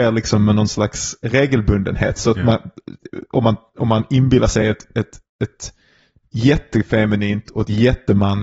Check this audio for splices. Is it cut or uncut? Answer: uncut